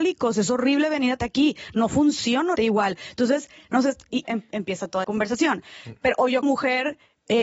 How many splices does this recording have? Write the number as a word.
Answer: five